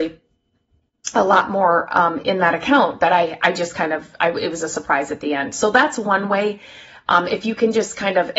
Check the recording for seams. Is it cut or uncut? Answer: uncut